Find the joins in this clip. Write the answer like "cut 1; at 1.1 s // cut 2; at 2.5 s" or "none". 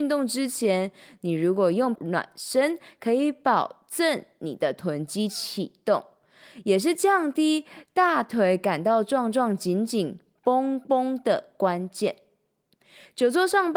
cut 1; at 2.0 s